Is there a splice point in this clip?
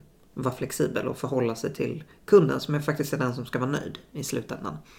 no; 0 cuts

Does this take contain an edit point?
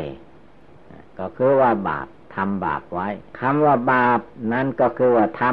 yes; 1 cut; at 3.3 s

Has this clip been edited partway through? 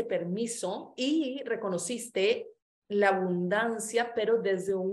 yes; 1 cut; at 2.6 s

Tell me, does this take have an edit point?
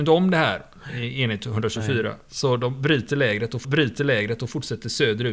yes; 1 cut; at 3.6 s

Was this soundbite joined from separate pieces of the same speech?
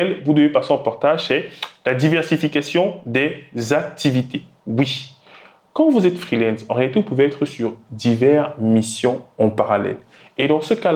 no; 0 cuts

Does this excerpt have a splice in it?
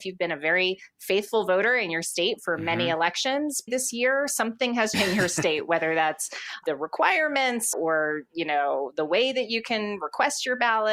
yes; 3 cuts; at 3.7 s, 4.9 s, 7.7 s

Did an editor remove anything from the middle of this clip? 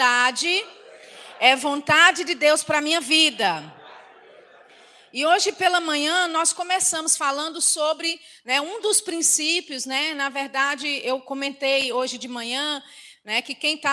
no; 0 cuts

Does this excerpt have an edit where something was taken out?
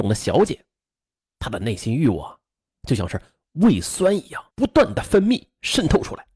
yes; 1 cut; at 4.5 s

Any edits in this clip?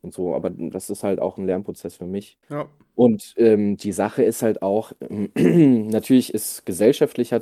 yes; 1 cut; at 2.4 s

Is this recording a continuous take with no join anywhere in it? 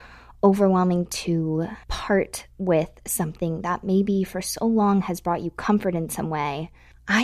no; 1 cut; at 1.8 s

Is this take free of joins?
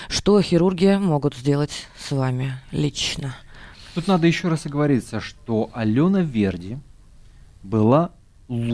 yes; 0 cuts

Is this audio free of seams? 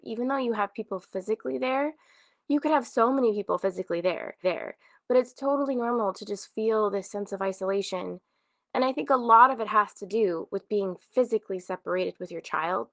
no; 1 cut; at 4.4 s

